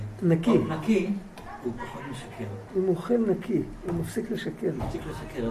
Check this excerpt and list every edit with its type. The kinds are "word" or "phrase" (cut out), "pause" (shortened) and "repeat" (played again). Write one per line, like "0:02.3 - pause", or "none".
0:02.7 - pause